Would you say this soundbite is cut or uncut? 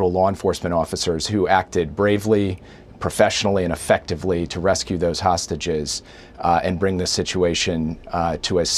uncut